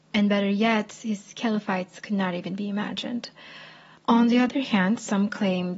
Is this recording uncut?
yes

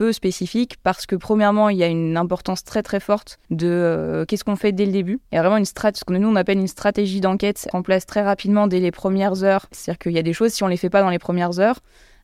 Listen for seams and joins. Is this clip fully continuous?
no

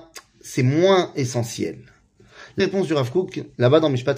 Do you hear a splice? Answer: yes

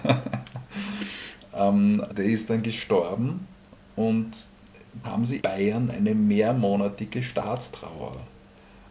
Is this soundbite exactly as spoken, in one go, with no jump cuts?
no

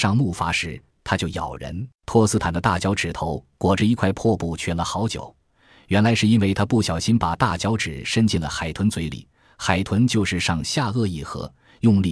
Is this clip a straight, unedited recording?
no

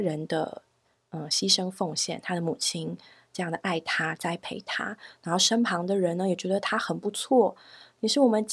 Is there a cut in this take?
no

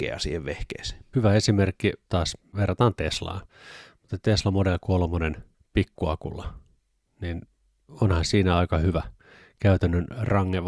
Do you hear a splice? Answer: no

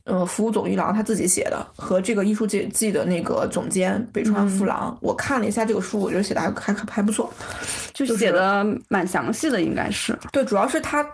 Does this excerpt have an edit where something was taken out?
yes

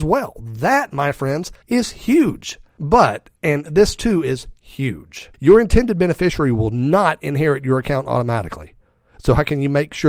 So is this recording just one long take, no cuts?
no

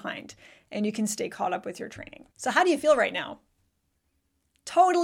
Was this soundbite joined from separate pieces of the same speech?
yes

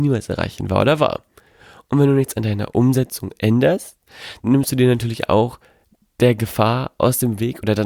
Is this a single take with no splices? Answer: no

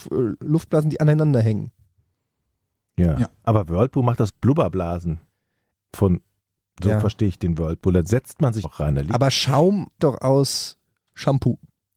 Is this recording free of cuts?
no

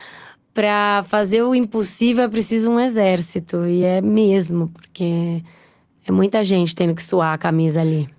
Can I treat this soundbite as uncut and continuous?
yes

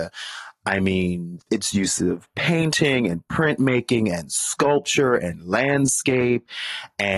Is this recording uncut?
yes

